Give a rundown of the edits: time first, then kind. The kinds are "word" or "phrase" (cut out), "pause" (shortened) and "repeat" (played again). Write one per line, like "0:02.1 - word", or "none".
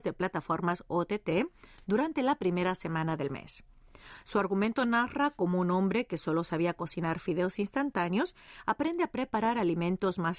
none